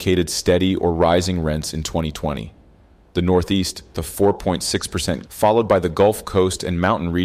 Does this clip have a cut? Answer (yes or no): yes